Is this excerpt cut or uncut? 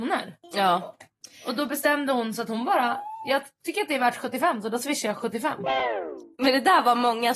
uncut